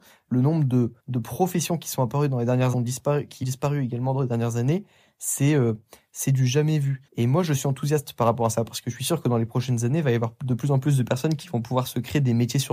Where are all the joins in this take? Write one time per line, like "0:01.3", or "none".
0:01.0
0:02.7
0:03.4
0:07.1